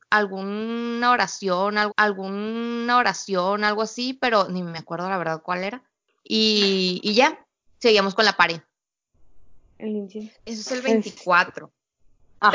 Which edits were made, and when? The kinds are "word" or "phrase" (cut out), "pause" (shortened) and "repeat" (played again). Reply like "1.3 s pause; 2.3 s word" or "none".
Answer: 1.9 s repeat; 10.4 s pause